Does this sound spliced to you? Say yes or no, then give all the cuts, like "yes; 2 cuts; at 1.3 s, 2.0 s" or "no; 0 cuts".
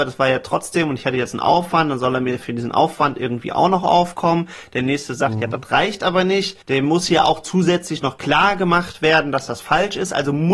yes; 1 cut; at 6.6 s